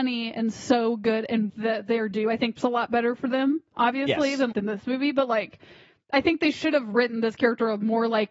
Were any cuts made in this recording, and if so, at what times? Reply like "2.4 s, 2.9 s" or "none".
1.5 s, 2.6 s, 4.5 s

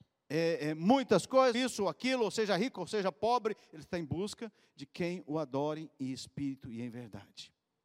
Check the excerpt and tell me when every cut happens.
1.5 s

